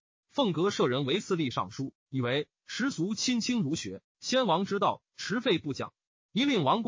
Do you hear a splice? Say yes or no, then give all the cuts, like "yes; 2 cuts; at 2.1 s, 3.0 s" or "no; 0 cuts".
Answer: no; 0 cuts